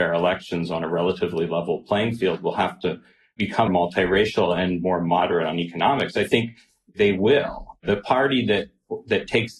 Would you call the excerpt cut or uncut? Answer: cut